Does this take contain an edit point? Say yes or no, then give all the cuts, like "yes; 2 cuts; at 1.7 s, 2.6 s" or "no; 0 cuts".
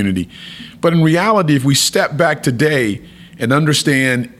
no; 0 cuts